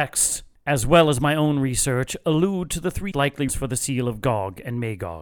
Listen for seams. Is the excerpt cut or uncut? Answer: cut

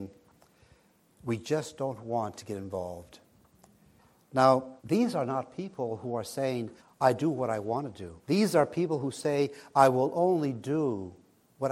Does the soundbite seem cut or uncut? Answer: cut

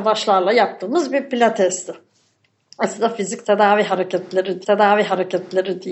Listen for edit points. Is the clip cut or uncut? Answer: cut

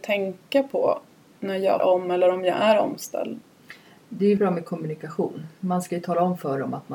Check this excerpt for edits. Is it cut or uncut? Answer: cut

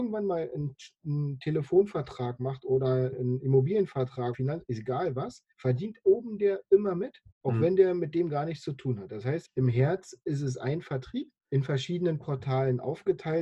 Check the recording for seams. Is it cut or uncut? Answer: cut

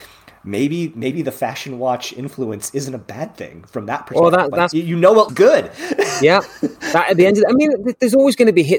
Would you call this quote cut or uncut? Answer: cut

